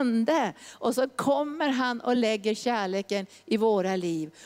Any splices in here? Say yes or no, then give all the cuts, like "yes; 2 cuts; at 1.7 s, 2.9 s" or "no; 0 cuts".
no; 0 cuts